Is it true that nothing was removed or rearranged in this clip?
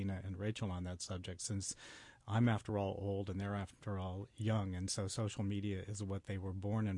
yes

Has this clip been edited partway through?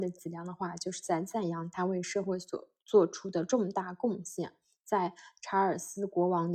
no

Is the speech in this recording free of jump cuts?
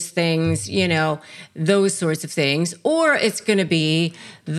yes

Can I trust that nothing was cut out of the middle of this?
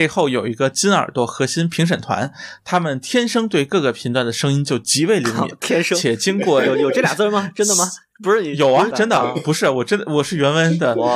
no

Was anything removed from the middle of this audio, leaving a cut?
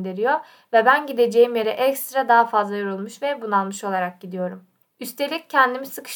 no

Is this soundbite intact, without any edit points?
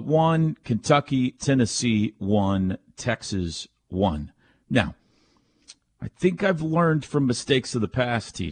no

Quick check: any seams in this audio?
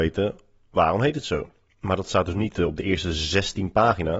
no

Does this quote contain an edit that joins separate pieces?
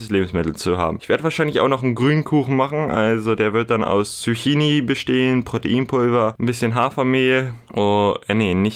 no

